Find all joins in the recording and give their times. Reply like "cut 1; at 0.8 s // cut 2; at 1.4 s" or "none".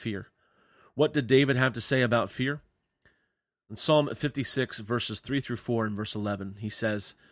none